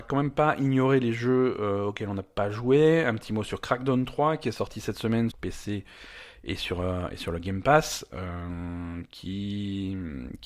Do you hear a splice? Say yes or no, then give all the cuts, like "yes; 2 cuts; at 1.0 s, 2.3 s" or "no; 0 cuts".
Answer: yes; 1 cut; at 5.3 s